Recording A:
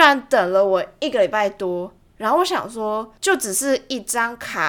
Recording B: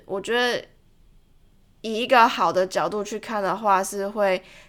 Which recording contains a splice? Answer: A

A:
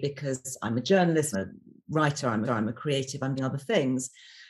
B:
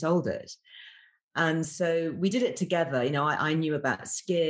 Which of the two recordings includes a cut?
A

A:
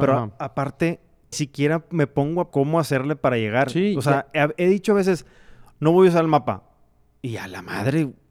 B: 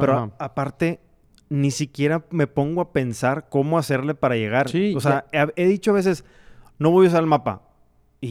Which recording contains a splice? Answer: A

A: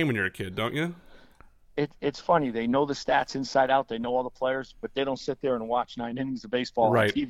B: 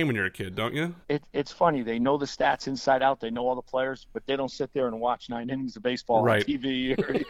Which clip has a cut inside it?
B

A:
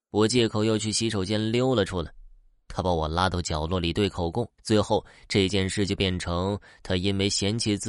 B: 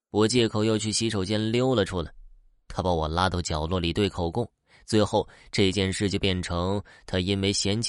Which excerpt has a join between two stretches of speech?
A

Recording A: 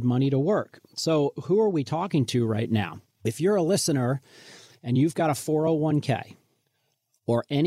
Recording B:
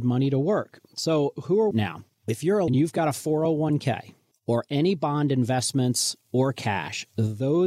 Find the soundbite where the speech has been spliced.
B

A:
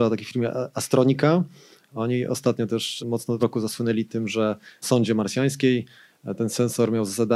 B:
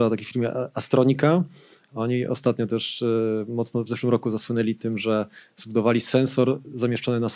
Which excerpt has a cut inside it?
A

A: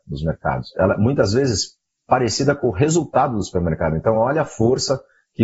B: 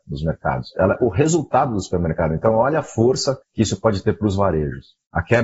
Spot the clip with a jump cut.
B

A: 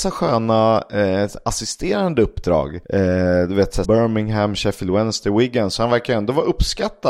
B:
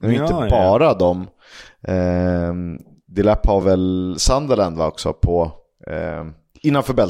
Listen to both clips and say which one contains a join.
A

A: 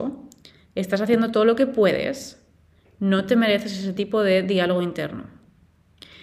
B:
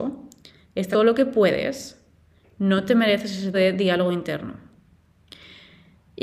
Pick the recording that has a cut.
B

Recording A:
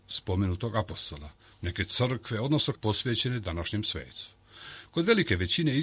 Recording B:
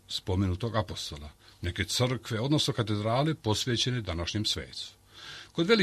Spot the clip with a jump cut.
A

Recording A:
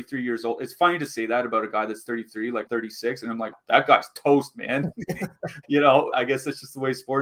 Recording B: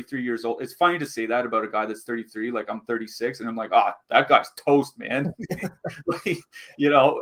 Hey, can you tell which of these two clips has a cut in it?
A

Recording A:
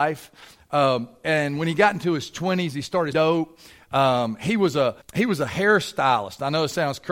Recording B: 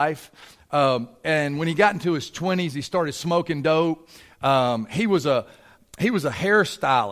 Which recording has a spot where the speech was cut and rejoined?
A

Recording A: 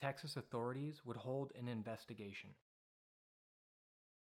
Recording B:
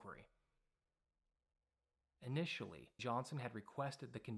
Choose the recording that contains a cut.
B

